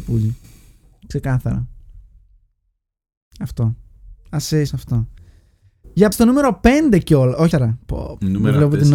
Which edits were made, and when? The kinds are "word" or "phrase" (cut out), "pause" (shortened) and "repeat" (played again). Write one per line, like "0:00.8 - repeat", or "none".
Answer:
0:04.7 - word
0:06.1 - word
0:07.5 - word